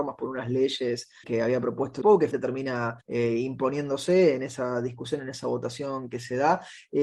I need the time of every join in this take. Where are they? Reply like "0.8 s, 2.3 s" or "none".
1.2 s, 2.0 s, 2.3 s, 3.0 s